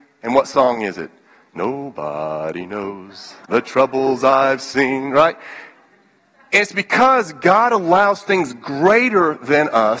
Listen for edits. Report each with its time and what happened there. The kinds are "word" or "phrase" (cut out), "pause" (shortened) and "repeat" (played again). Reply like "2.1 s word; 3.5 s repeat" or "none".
3.4 s pause